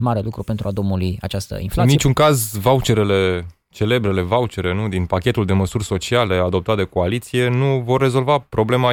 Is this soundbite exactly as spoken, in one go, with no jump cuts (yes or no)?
yes